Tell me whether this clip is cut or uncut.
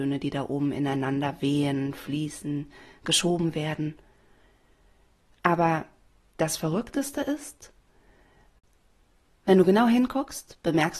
uncut